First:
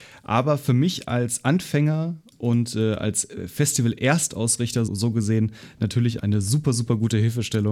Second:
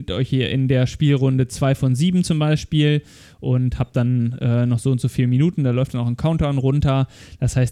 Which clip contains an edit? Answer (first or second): first